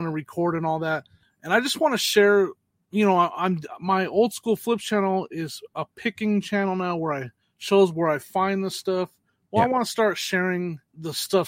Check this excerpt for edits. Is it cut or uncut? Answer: uncut